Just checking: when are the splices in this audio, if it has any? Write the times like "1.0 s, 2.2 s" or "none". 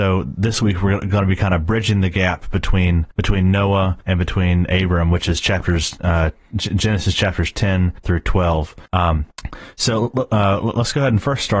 none